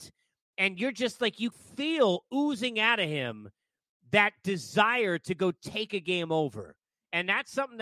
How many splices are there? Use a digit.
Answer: 1